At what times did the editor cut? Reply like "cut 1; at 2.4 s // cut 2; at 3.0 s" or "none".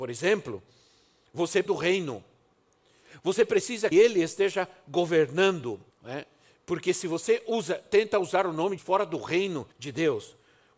cut 1; at 1.7 s // cut 2; at 3.9 s // cut 3; at 5.9 s // cut 4; at 8.8 s // cut 5; at 9.7 s